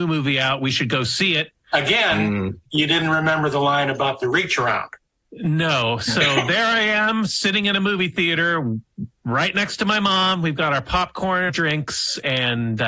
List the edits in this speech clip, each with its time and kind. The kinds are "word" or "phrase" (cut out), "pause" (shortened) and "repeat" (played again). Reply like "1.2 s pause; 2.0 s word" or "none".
11.5 s word

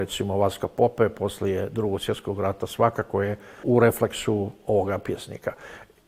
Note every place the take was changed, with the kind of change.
3.6 s word

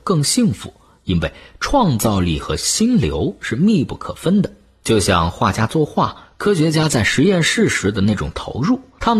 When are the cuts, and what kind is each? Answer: none

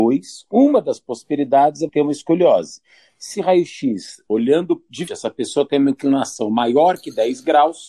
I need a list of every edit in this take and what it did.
1.9 s word; 3.3 s word; 5.1 s word

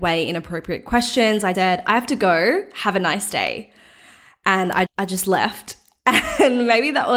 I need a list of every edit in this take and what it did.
1.5 s word; 4.9 s word

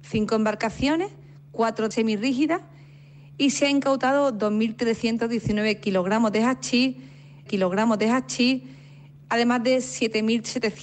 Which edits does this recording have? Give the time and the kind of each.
1.9 s word; 7.5 s repeat

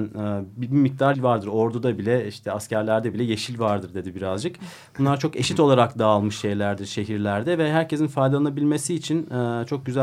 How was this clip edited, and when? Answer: 1.1 s word

